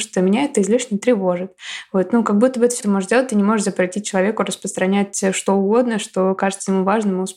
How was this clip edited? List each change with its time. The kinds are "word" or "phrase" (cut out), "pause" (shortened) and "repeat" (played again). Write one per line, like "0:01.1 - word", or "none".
0:02.8 - word

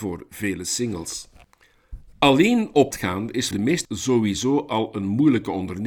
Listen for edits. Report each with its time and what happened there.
0:02.9 - word
0:03.5 - word
0:03.8 - word

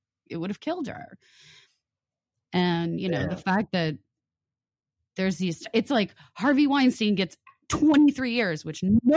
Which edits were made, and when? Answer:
none

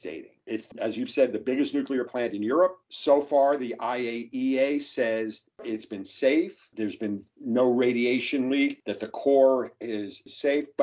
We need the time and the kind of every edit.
0:02.1 - word

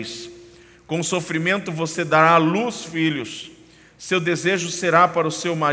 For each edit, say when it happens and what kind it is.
none

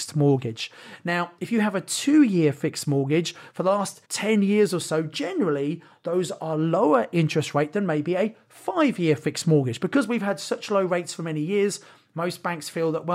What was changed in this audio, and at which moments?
0:04.0 - pause

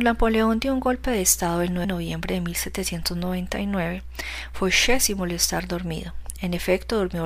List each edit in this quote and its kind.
0:01.8 - word

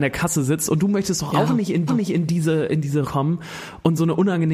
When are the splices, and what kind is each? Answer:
0:01.9 - repeat
0:03.0 - word

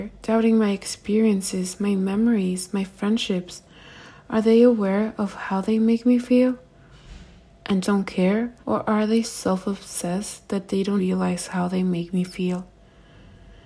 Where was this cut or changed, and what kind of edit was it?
0:07.8 - word
0:08.6 - pause
0:09.2 - word
0:11.0 - word

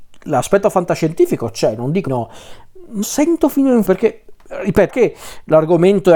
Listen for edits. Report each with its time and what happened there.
0:02.1 - word
0:03.0 - phrase
0:03.8 - word
0:04.9 - word

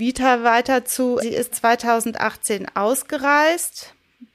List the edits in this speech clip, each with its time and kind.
0:01.2 - word
0:01.5 - word

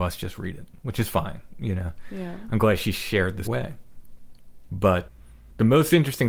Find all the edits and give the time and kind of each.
0:03.4 - phrase

